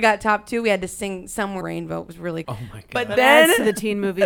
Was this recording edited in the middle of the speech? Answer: yes; 2 cuts; at 1.6 s, 2.4 s

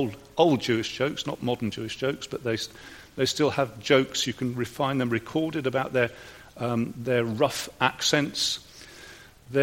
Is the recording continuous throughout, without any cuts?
yes; 0 cuts

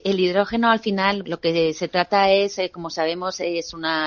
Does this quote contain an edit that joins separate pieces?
yes; 1 cut; at 1.2 s

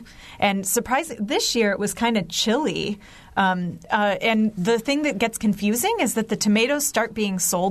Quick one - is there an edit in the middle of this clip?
no; 0 cuts

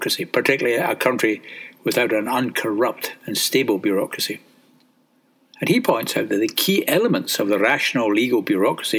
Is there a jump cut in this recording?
no; 0 cuts

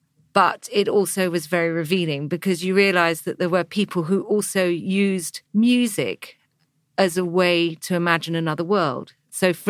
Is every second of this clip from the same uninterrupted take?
no; 1 cut; at 5.5 s

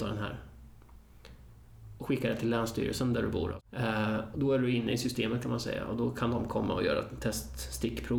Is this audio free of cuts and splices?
no; 1 cut; at 4.3 s

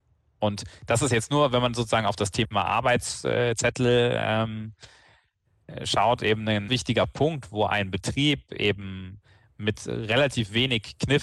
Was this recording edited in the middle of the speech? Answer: yes; 1 cut; at 6.7 s

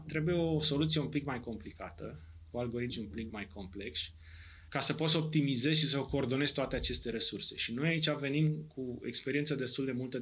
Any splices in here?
yes; 2 cuts; at 2.9 s, 3.3 s

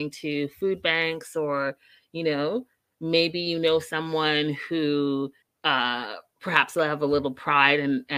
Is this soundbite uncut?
no; 1 cut; at 5.4 s

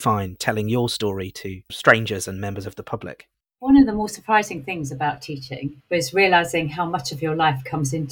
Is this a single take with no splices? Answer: yes; 0 cuts

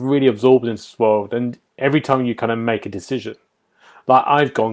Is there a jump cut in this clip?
yes; 1 cut; at 1.7 s

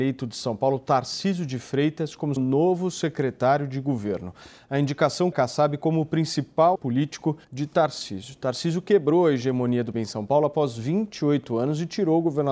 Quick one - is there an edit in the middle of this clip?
yes; 5 cuts; at 2.4 s, 5.3 s, 6.7 s, 7.4 s, 9.9 s

